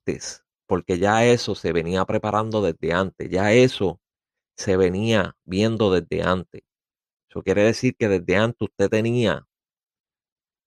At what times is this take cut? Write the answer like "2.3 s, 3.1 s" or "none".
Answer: none